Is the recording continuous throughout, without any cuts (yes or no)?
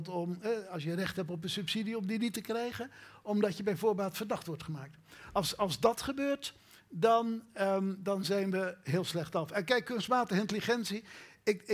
yes